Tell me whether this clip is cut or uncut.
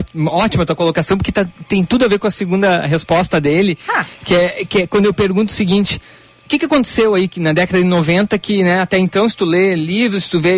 uncut